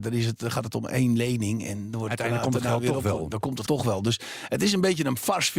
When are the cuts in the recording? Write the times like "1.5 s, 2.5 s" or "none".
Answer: 3.7 s